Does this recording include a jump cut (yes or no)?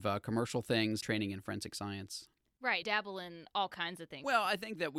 yes